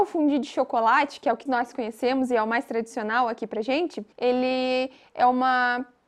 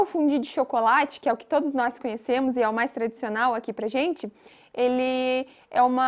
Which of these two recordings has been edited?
first; 2 cuts; at 1.5 s, 4.1 s

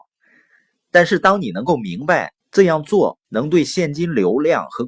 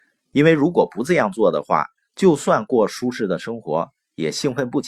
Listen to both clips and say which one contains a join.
first; 2 cuts; at 2.4 s, 3.2 s

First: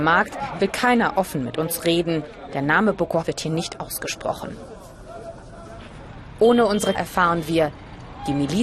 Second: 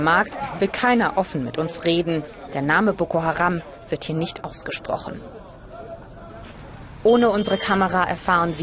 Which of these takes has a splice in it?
first; 2 cuts; at 3.2 s, 6.9 s

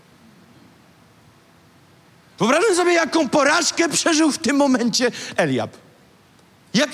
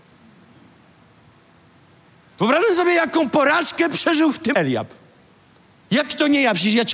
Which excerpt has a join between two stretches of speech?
second; 1 cut; at 4.5 s

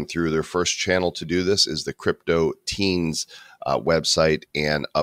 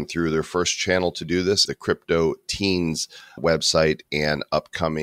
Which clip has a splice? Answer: second; 2 cuts; at 1.7 s, 3.4 s

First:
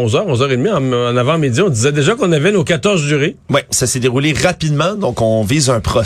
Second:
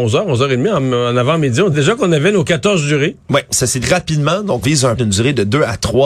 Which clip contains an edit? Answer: second; 4 cuts; at 1.7 s, 3.8 s, 4.6 s, 5.0 s

